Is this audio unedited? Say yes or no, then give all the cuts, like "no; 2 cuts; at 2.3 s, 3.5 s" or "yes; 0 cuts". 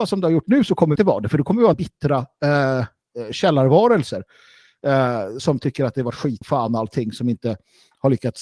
no; 4 cuts; at 1.0 s, 1.7 s, 5.4 s, 6.4 s